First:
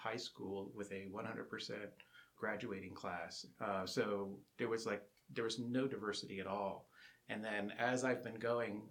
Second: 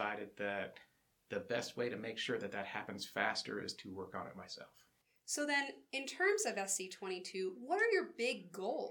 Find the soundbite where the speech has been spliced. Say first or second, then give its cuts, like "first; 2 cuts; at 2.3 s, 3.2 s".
first; 1 cut; at 2.4 s